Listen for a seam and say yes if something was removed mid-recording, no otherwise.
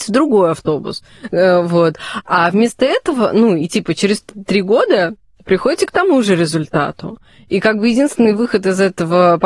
no